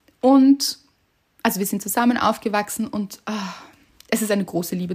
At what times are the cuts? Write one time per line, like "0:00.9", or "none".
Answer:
none